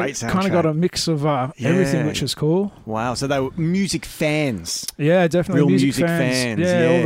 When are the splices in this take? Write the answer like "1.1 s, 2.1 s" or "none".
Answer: none